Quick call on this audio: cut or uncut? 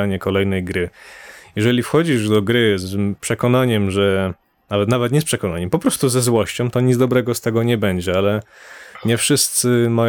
uncut